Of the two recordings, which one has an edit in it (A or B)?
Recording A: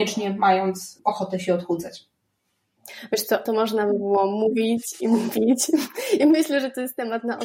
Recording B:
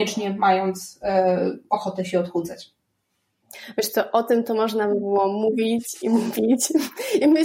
A